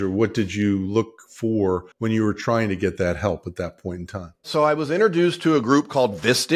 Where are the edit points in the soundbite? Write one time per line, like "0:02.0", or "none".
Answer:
0:01.9